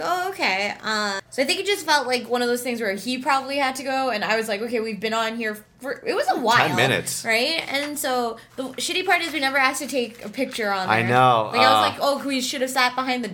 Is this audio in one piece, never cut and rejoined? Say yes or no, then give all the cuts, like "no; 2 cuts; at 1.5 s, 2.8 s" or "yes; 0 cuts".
yes; 0 cuts